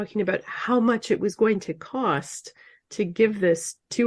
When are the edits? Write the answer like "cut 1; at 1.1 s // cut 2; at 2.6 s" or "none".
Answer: none